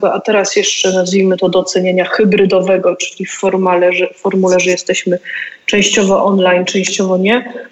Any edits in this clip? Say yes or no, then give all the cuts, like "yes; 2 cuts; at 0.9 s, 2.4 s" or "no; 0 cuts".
no; 0 cuts